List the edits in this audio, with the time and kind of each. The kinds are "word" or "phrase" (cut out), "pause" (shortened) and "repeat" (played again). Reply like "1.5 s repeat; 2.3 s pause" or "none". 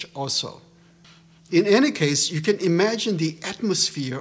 none